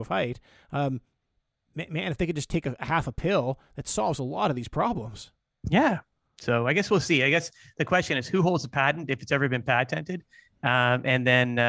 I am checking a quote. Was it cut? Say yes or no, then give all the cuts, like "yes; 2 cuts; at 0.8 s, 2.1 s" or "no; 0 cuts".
no; 0 cuts